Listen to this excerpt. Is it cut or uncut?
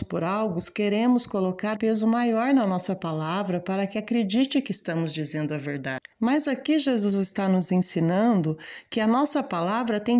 cut